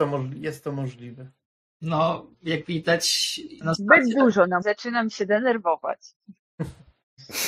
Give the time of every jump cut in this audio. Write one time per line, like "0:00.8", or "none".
0:01.6
0:03.6
0:04.6